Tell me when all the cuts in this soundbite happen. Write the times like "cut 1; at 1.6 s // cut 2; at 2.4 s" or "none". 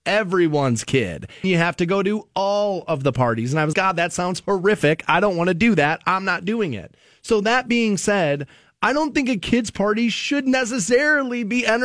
cut 1; at 1.4 s // cut 2; at 3.7 s